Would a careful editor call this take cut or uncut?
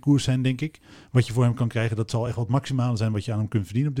uncut